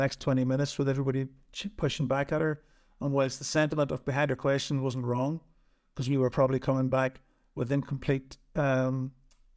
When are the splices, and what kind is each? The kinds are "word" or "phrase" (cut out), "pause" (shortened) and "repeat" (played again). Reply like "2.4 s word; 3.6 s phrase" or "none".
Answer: none